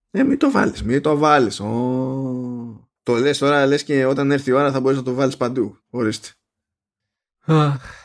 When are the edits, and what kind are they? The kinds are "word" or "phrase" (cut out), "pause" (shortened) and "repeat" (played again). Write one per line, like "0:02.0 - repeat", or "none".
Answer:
0:03.0 - pause
0:05.8 - pause